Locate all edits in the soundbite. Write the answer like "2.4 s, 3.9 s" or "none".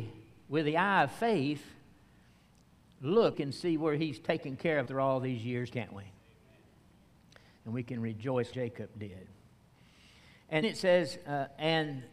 3.3 s, 4.8 s, 5.7 s, 8.5 s, 10.6 s